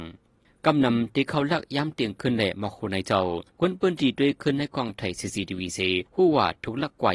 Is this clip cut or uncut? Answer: cut